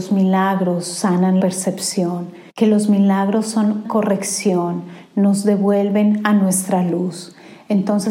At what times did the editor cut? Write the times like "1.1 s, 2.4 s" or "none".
1.4 s, 2.5 s, 3.8 s